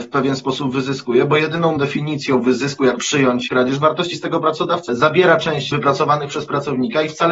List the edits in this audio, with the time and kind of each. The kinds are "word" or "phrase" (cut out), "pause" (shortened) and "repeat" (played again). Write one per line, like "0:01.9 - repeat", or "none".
0:01.8 - word
0:03.0 - word
0:03.5 - word
0:04.1 - word
0:04.9 - word
0:05.7 - word